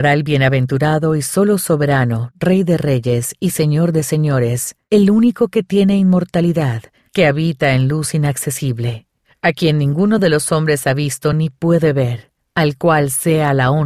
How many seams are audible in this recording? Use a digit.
0